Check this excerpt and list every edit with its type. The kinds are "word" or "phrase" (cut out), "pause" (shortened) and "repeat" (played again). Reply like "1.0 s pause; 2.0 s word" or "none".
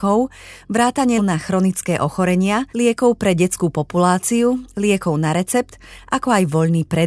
1.2 s word; 2.7 s pause